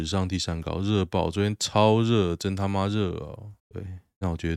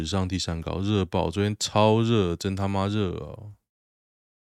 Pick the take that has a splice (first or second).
first